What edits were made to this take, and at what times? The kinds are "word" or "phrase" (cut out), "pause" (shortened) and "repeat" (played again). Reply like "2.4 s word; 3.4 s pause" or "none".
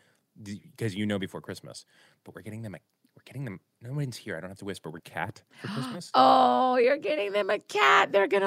5.0 s phrase; 5.5 s pause